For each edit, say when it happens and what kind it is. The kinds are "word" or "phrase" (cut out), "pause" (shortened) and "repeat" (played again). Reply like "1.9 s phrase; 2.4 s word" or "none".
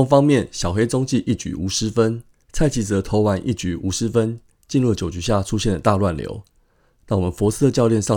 2.4 s pause